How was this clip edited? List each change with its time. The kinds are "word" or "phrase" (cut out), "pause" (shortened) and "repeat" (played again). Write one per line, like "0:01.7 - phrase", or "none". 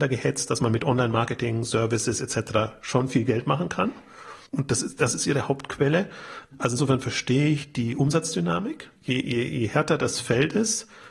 0:04.5 - pause
0:09.0 - pause